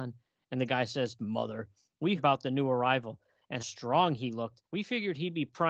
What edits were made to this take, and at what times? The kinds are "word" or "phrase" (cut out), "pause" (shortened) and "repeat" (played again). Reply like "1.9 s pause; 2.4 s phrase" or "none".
1.2 s word; 2.2 s word; 3.6 s word; 4.6 s pause